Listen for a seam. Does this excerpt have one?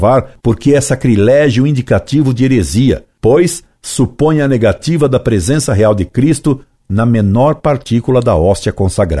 no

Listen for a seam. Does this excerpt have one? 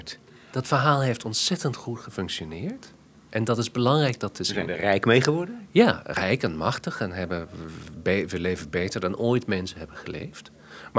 no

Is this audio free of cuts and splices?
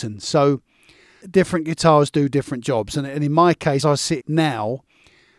no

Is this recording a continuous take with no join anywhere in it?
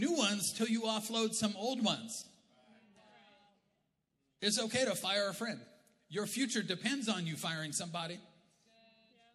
yes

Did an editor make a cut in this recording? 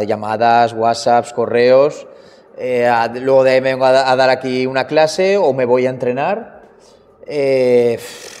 no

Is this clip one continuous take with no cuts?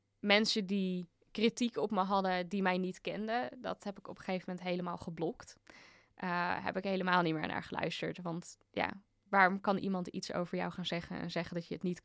yes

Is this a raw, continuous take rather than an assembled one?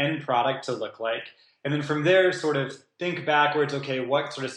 yes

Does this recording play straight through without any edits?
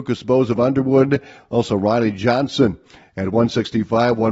yes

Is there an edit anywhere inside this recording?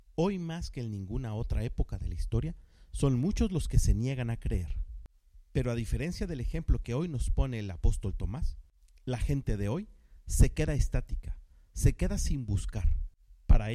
no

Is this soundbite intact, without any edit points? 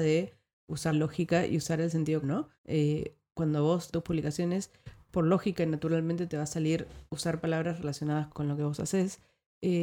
no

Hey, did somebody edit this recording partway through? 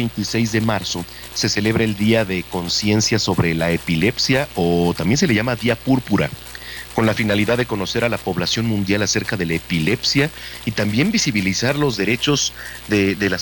no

